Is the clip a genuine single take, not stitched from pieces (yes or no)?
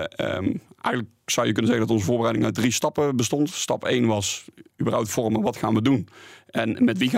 yes